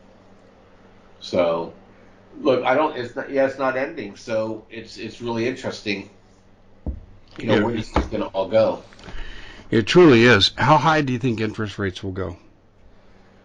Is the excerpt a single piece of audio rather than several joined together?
yes; 0 cuts

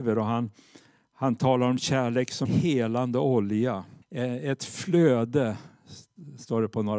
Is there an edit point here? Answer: yes; 2 cuts; at 2.5 s, 4.0 s

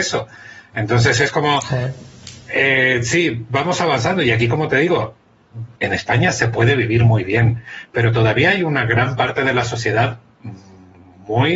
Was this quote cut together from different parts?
yes; 1 cut; at 5.8 s

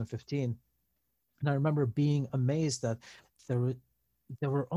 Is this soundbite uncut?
yes; 0 cuts

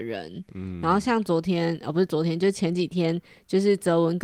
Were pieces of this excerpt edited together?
no; 0 cuts

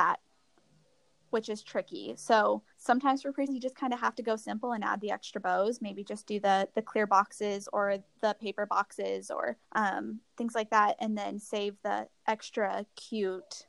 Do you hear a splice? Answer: yes; 3 cuts; at 2.7 s, 3.5 s, 9.6 s

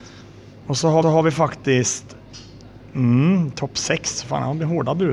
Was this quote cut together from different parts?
yes; 1 cut; at 1.0 s

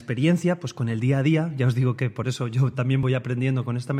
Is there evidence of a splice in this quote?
no; 0 cuts

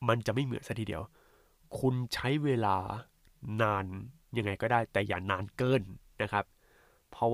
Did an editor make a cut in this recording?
no; 0 cuts

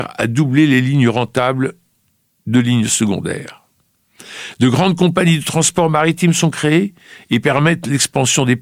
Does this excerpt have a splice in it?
no; 0 cuts

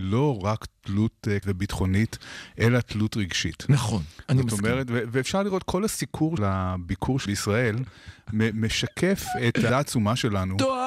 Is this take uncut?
no; 4 cuts; at 1.4 s, 6.4 s, 7.3 s, 9.7 s

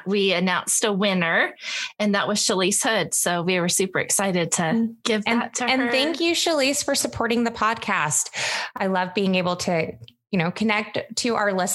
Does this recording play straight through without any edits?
yes; 0 cuts

